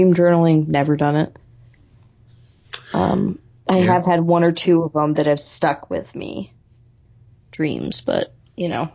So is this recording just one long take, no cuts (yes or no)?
yes